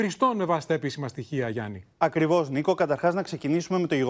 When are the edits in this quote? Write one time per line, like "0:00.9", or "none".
0:01.9